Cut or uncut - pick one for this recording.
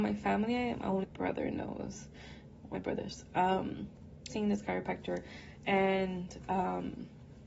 cut